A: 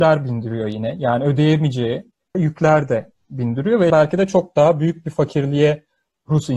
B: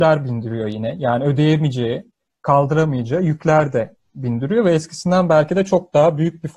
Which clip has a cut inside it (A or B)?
A